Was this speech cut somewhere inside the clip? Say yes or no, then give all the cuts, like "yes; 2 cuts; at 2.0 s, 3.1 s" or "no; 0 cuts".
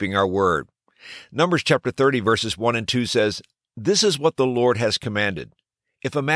no; 0 cuts